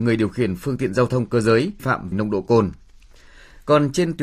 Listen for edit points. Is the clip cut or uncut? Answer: cut